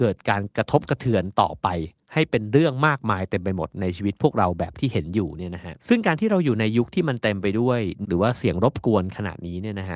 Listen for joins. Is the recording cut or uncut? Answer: cut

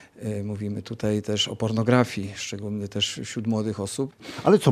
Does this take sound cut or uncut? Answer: uncut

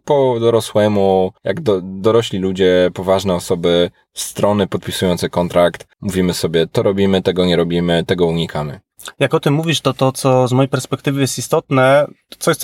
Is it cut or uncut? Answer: cut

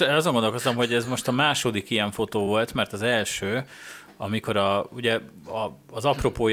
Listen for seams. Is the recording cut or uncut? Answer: uncut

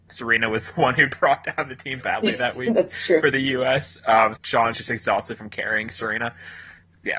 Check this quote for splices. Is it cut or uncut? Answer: cut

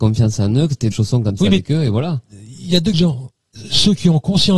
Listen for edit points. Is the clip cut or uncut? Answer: cut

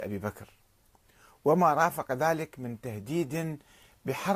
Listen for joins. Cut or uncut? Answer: uncut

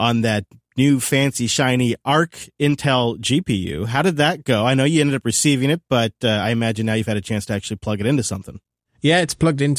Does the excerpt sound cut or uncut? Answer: uncut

